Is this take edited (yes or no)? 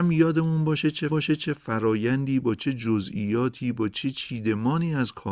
yes